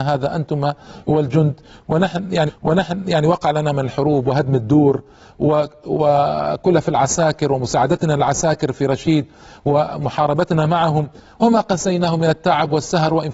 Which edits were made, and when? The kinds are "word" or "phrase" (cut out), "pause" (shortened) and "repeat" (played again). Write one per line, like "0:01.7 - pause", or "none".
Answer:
0:02.5 - repeat